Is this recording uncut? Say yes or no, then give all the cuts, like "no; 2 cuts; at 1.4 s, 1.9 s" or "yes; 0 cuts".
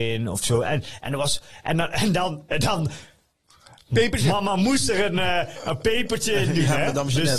yes; 0 cuts